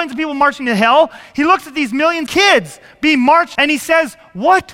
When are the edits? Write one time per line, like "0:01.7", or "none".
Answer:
0:02.3
0:03.5